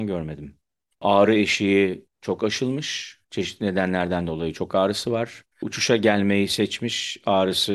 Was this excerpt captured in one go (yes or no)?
no